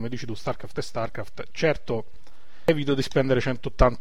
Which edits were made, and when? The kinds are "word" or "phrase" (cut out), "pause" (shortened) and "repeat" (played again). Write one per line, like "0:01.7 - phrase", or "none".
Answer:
none

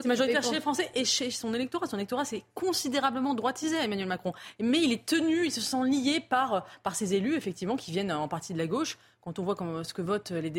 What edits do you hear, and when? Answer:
none

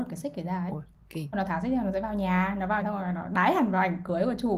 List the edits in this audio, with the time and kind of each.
0:01.3 - word
0:02.8 - word

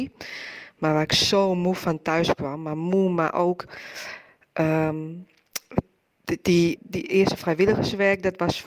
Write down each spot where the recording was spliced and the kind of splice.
0:06.8 - word

